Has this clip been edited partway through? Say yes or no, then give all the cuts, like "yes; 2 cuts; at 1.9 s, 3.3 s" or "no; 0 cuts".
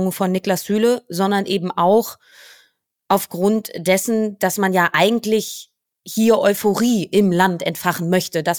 no; 0 cuts